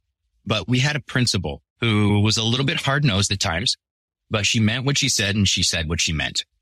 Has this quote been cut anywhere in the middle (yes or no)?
no